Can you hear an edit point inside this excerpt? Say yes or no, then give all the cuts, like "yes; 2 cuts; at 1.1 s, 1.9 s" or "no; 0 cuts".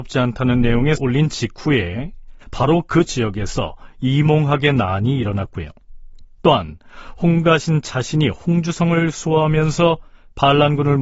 yes; 3 cuts; at 1.0 s, 2.4 s, 3.1 s